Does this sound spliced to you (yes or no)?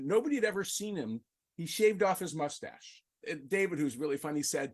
yes